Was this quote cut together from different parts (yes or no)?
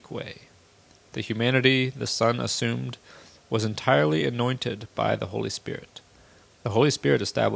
no